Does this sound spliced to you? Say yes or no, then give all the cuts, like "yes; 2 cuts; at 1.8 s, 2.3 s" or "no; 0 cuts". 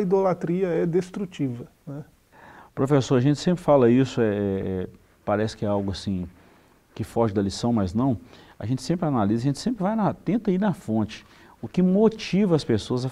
yes; 1 cut; at 1.8 s